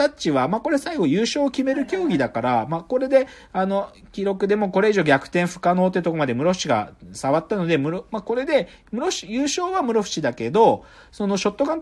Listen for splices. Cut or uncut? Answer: uncut